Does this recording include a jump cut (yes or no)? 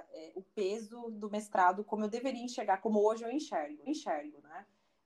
yes